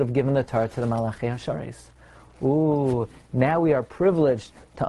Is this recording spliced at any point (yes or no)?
no